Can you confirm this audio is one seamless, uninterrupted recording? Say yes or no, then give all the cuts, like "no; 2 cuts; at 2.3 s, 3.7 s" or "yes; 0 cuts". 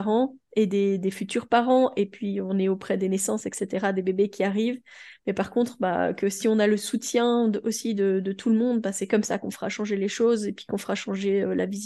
yes; 0 cuts